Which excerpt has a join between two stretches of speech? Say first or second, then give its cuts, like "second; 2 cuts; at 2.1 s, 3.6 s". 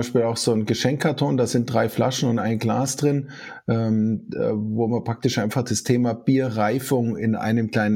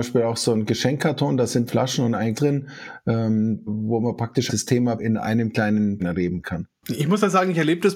second; 6 cuts; at 1.7 s, 2.3 s, 3.7 s, 4.5 s, 5.0 s, 6.0 s